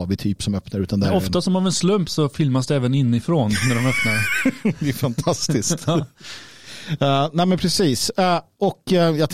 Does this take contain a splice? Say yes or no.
no